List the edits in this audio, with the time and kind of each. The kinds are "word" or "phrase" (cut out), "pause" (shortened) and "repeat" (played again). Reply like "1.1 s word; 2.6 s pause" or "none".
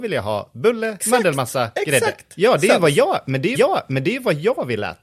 1.0 s word; 3.5 s repeat